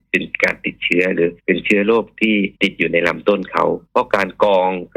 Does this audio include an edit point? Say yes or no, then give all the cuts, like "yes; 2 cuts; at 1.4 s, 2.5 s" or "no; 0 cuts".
yes; 3 cuts; at 1.4 s, 2.6 s, 3.9 s